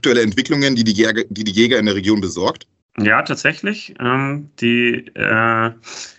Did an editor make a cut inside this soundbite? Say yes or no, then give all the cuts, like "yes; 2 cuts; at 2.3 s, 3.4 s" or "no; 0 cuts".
yes; 1 cut; at 2.8 s